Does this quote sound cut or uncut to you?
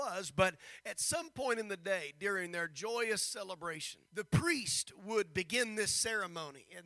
cut